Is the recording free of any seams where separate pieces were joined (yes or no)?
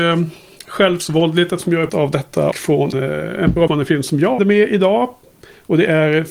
no